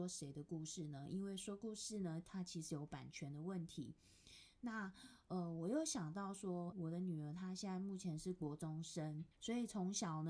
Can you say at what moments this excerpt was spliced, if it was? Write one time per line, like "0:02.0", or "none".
0:06.7
0:09.3